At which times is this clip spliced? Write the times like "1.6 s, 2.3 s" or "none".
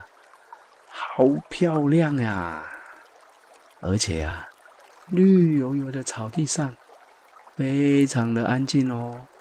none